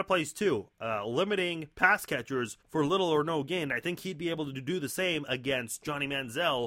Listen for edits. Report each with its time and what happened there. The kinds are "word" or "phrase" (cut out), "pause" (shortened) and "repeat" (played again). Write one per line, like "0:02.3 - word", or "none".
0:01.7 - pause
0:02.6 - pause